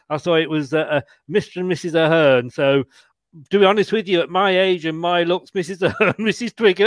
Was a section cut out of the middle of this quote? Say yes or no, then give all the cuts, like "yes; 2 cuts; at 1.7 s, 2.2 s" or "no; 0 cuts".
no; 0 cuts